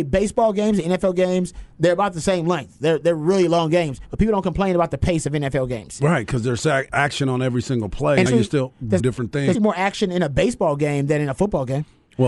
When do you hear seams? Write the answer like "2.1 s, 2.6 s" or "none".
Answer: 8.3 s, 9.0 s, 9.5 s

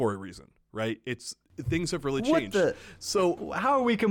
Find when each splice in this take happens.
1.4 s

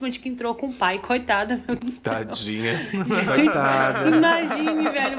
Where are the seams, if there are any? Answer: 1.8 s

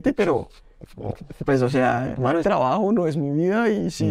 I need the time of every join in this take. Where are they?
2.4 s

